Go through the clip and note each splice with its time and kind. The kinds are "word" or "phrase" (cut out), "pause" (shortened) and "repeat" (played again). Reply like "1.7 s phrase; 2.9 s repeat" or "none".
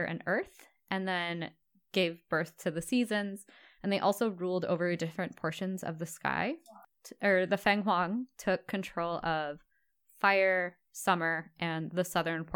none